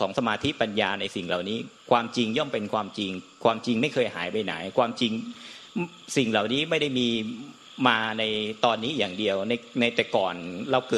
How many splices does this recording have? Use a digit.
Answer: 1